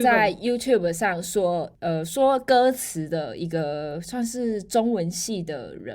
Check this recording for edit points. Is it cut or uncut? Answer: uncut